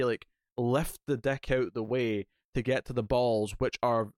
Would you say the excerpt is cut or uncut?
uncut